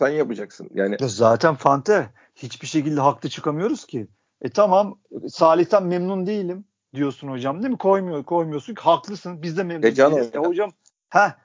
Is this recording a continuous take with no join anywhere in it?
yes; 0 cuts

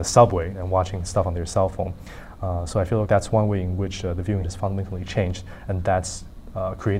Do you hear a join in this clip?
yes; 2 cuts; at 3.1 s, 4.4 s

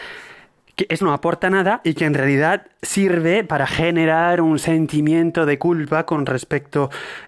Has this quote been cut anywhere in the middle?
yes; 1 cut; at 1.0 s

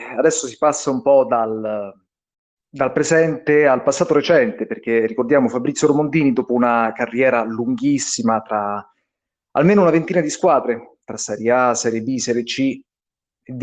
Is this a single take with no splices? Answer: yes; 0 cuts

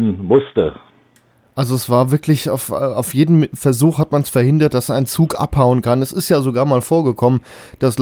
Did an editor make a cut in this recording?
no; 0 cuts

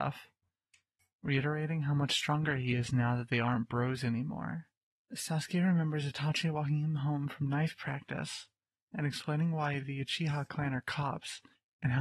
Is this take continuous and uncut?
yes; 0 cuts

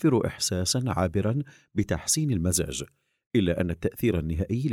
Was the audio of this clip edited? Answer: no; 0 cuts

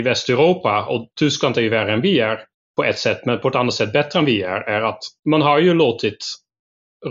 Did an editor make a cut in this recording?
yes; 3 cuts; at 1.1 s, 2.5 s, 5.2 s

